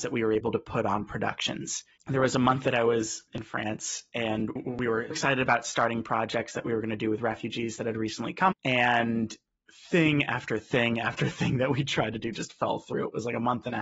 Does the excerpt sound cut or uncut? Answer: cut